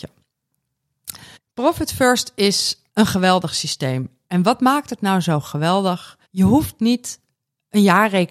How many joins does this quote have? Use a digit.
3